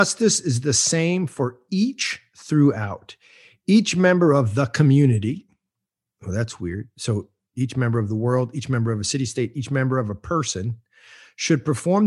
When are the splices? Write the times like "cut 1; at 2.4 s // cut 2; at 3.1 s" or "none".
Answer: none